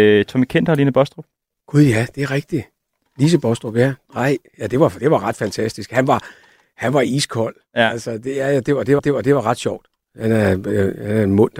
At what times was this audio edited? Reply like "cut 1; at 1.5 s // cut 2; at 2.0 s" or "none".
cut 1; at 9.0 s